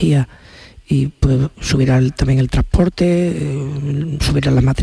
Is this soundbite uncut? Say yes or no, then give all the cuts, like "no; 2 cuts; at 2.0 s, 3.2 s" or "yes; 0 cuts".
yes; 0 cuts